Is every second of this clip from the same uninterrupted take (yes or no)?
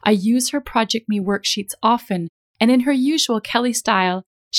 yes